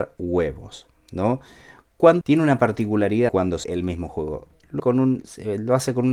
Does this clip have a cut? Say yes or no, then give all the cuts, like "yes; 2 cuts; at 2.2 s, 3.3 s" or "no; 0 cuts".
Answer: yes; 4 cuts; at 2.2 s, 3.3 s, 3.6 s, 4.8 s